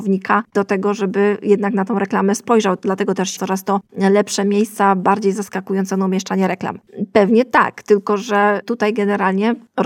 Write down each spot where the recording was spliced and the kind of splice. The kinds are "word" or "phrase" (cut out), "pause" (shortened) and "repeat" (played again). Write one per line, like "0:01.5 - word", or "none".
0:03.4 - word